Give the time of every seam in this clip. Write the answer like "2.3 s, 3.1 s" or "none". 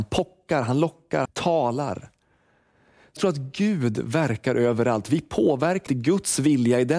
1.3 s, 3.2 s, 5.9 s